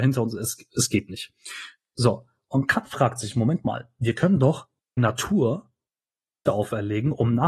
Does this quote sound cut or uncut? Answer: cut